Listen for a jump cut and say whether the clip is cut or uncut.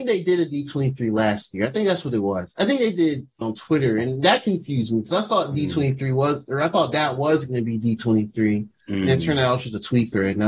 cut